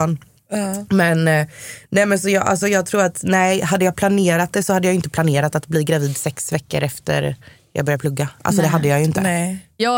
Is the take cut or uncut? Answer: uncut